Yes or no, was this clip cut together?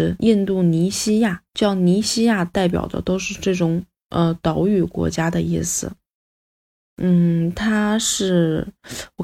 no